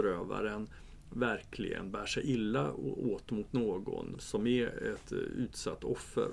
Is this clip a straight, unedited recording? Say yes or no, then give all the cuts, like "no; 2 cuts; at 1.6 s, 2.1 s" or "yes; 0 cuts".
yes; 0 cuts